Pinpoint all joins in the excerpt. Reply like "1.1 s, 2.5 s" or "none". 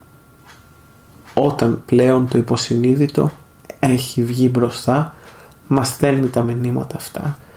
none